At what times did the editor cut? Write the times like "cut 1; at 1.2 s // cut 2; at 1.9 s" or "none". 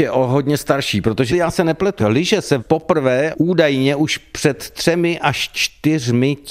cut 1; at 1.3 s // cut 2; at 2.0 s // cut 3; at 2.6 s // cut 4; at 3.3 s